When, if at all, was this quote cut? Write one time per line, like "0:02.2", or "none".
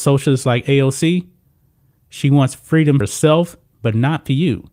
0:03.0

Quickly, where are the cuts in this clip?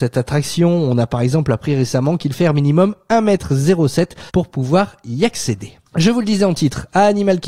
0:02.3
0:04.3
0:05.9

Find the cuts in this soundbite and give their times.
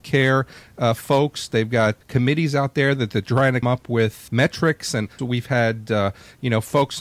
0:02.0
0:03.6
0:04.3
0:05.2

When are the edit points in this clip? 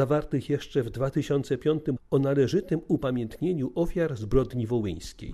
0:02.0

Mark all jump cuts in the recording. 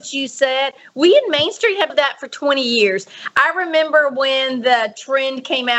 0:01.9

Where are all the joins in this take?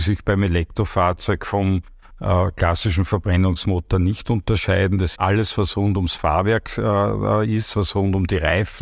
0:05.2
0:07.7

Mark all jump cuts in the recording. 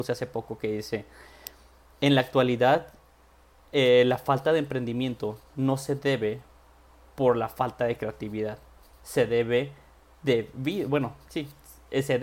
none

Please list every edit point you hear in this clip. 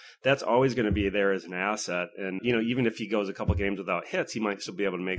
0:02.4

